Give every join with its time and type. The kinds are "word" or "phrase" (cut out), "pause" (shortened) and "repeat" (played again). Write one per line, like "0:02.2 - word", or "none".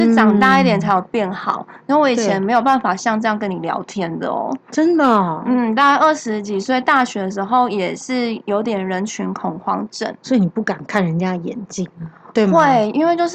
none